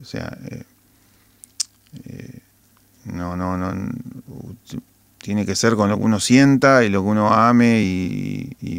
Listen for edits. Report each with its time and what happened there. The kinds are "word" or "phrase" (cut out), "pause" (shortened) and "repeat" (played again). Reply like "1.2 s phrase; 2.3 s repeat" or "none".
none